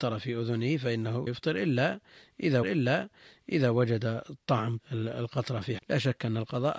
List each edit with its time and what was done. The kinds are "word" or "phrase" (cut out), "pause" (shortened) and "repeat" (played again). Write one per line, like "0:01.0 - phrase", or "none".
0:01.3 - word
0:02.6 - repeat
0:04.8 - word
0:05.8 - word